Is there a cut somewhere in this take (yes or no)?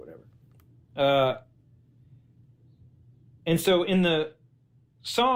no